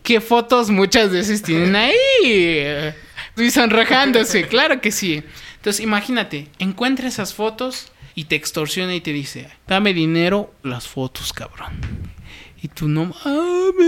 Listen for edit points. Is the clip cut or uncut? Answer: cut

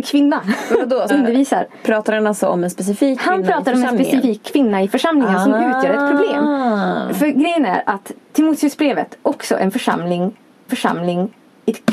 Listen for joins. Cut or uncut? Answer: cut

